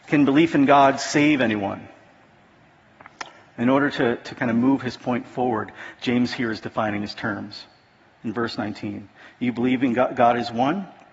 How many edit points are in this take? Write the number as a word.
zero